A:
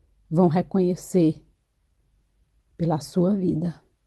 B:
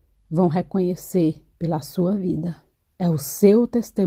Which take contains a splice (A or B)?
B